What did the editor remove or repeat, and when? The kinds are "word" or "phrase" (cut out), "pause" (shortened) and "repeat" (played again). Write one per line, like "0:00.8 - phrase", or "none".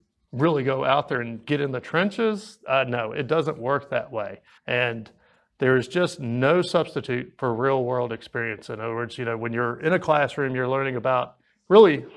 0:04.6 - pause